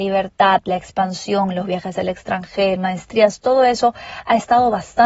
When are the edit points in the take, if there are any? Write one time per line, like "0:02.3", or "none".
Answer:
0:02.8